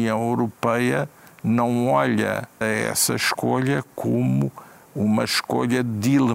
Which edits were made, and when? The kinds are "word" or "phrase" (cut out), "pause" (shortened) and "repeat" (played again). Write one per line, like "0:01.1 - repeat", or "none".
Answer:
0:02.6 - word